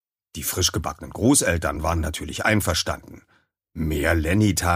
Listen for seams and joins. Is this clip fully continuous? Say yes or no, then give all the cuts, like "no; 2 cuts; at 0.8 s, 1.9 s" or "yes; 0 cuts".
yes; 0 cuts